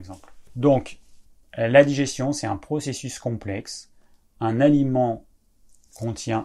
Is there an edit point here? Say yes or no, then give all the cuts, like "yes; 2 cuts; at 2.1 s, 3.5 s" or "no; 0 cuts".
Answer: no; 0 cuts